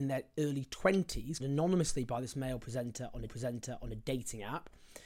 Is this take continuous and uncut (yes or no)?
no